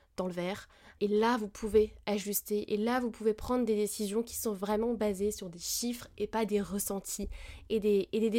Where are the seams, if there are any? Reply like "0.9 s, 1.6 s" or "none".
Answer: 1.0 s